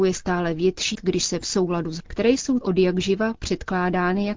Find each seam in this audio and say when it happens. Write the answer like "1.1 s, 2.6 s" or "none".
0.9 s, 1.4 s, 2.0 s, 2.6 s